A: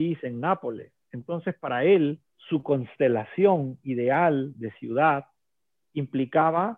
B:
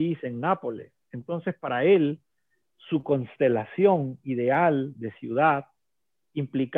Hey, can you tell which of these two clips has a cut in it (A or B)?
A